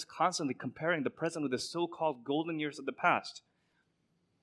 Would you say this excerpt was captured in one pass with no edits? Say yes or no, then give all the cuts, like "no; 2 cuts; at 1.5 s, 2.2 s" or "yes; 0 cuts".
yes; 0 cuts